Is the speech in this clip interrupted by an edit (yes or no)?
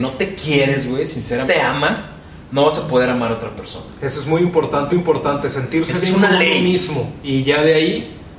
yes